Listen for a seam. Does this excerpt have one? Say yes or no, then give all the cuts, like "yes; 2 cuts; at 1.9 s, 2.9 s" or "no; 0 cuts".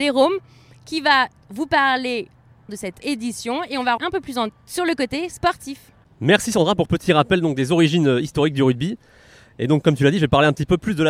yes; 5 cuts; at 2.7 s, 3.0 s, 4.0 s, 4.5 s, 6.9 s